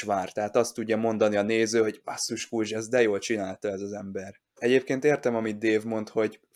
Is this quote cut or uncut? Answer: cut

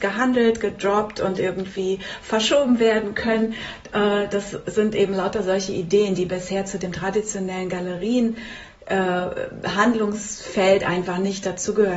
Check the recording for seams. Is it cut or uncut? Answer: uncut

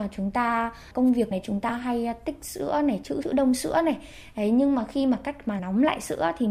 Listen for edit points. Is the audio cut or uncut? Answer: cut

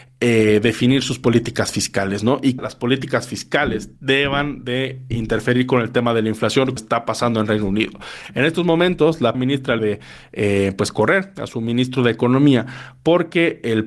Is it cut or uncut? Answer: cut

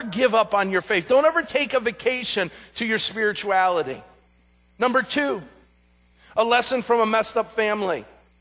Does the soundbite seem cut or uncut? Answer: uncut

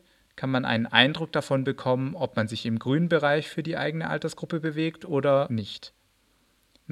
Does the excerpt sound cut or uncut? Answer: uncut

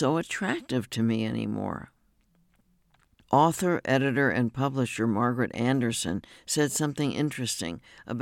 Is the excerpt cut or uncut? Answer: uncut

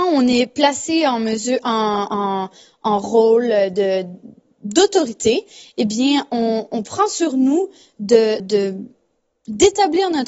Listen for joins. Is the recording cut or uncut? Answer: cut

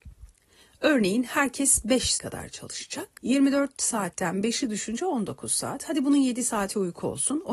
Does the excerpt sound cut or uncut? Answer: cut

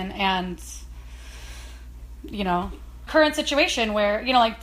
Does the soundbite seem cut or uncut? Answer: cut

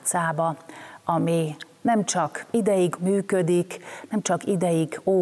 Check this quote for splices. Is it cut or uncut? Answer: cut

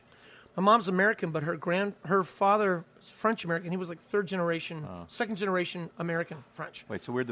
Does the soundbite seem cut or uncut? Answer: uncut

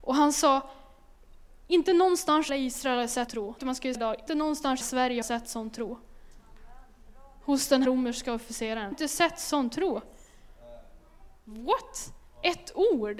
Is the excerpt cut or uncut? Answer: cut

